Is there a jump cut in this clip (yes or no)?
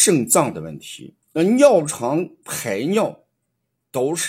yes